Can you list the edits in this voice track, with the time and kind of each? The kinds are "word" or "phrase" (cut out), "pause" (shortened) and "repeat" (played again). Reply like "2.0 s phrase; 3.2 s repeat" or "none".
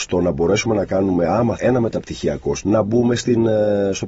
1.6 s word; 2.6 s word